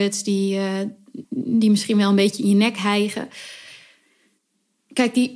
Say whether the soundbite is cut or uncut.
cut